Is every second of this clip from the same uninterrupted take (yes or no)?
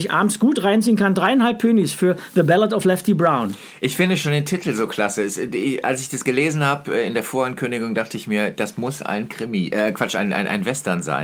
yes